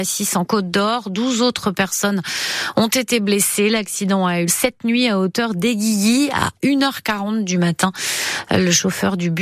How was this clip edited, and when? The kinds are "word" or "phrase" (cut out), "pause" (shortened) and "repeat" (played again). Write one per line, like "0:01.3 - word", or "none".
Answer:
0:04.5 - word